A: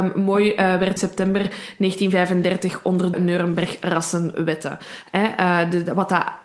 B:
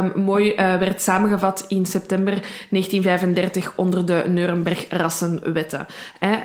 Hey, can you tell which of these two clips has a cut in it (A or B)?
A